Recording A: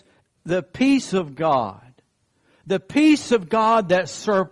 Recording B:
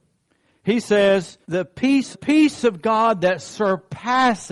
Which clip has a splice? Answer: B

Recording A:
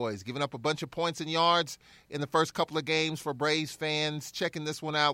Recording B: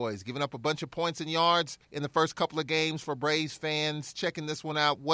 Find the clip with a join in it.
B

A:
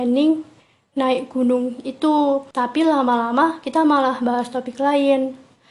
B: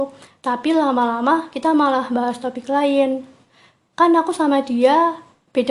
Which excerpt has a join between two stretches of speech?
A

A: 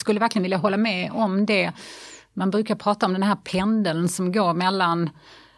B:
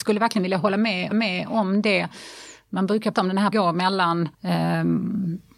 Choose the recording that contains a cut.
B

